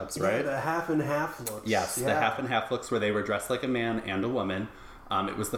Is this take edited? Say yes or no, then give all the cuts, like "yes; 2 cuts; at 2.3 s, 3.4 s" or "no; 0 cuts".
no; 0 cuts